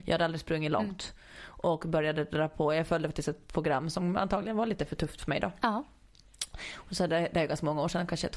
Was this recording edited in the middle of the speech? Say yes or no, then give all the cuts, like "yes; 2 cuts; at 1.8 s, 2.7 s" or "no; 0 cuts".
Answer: no; 0 cuts